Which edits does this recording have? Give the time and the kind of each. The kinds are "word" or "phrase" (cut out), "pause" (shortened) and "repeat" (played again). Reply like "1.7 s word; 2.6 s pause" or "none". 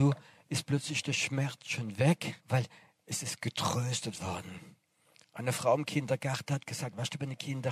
2.4 s pause